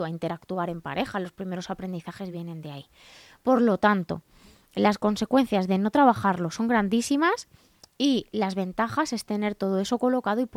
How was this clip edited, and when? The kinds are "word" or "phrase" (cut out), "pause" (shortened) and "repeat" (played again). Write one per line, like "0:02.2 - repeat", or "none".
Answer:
none